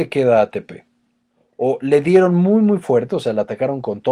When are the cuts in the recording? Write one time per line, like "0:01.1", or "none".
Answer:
none